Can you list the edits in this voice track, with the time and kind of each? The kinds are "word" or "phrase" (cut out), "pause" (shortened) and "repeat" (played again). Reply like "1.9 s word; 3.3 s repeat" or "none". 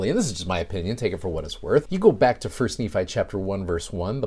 none